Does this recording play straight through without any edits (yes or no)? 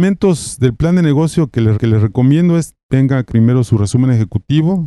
no